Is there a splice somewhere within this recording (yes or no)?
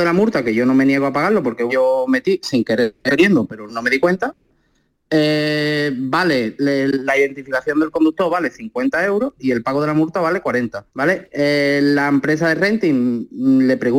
yes